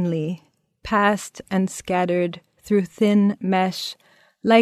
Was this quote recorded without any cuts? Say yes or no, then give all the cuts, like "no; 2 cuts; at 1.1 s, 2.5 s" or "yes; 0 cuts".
yes; 0 cuts